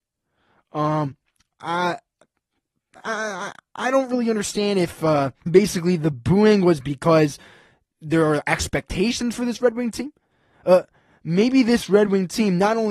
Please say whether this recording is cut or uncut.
cut